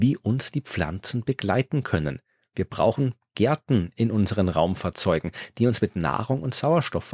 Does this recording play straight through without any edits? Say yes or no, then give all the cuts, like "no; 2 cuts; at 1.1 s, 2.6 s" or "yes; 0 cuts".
yes; 0 cuts